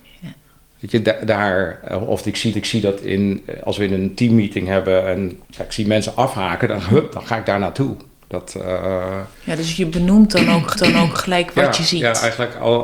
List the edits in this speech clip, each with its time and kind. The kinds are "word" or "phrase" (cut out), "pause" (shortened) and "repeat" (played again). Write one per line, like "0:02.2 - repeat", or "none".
0:02.5 - repeat
0:05.4 - pause
0:09.3 - pause
0:10.7 - repeat

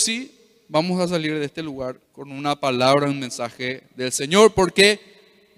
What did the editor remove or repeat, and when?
0:02.0 - pause

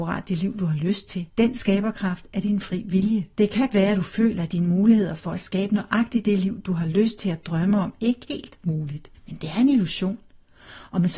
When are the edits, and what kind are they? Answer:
0:01.3 - pause
0:03.3 - pause
0:03.7 - word
0:08.3 - word
0:09.1 - pause

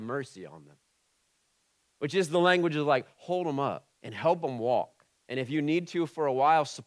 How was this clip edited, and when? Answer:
0:03.9 - pause
0:05.2 - pause

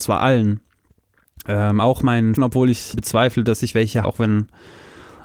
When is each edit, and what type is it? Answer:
0:02.4 - word
0:02.9 - word
0:04.0 - word

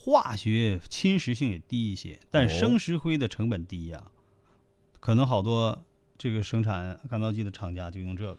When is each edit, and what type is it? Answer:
none

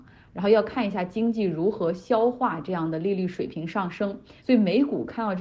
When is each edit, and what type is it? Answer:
0:04.4 - pause

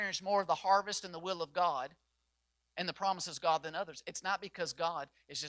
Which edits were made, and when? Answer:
none

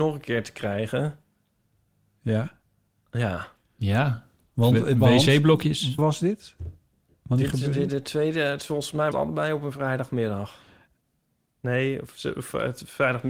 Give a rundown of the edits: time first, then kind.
0:06.0 - word
0:07.9 - word
0:09.1 - word

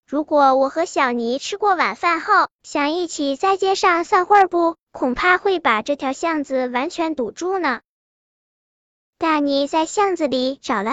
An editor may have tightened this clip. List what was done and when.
none

